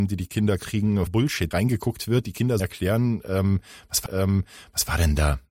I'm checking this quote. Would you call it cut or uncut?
cut